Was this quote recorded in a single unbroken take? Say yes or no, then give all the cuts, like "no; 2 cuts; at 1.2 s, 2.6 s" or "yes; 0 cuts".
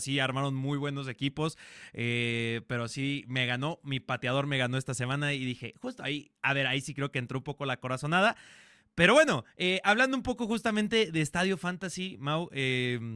yes; 0 cuts